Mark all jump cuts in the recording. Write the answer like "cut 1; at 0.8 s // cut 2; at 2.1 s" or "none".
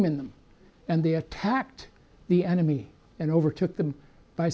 none